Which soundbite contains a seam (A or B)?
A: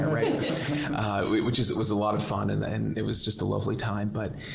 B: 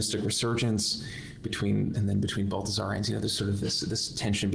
B